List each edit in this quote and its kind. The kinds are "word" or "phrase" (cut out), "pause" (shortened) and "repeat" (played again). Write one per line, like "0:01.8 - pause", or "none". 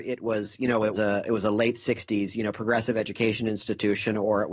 0:00.9 - word

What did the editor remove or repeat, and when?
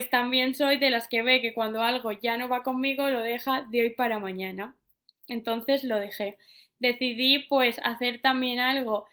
none

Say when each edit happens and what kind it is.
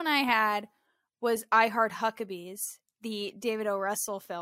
none

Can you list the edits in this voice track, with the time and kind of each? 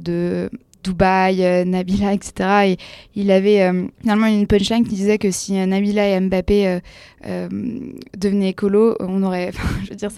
0:03.9 - pause

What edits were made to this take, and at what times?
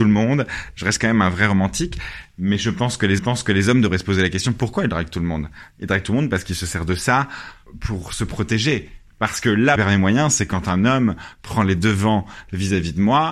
0:03.2 - repeat
0:07.7 - word
0:09.8 - phrase

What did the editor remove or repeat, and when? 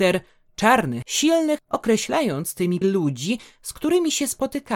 0:01.0 - word
0:01.6 - word
0:02.8 - word

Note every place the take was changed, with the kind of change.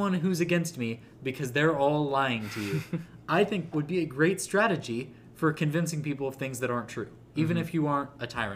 0:03.7 - word

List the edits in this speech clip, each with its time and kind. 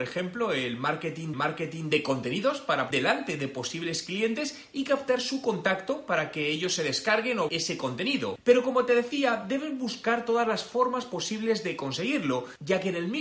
0:01.3 - repeat
0:02.9 - word
0:07.5 - word

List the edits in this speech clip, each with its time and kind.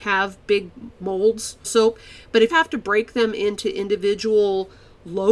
0:01.6 - word
0:02.5 - word

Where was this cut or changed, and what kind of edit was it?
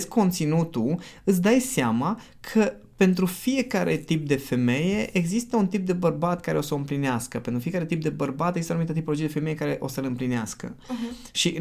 none

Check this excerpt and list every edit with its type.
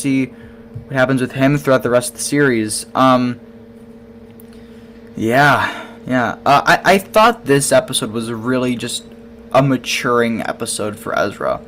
0:06.0 - pause

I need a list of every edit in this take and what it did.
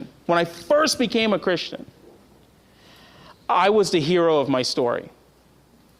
none

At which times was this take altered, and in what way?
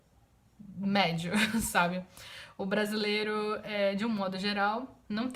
none

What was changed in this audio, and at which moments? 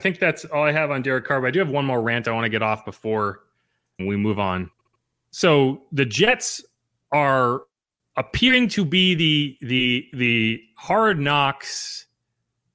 0:04.0 - word

